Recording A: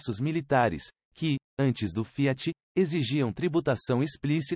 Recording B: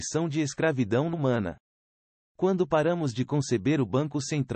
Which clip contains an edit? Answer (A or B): B